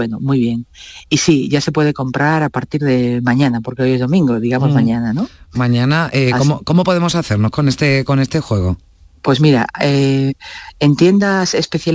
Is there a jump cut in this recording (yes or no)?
yes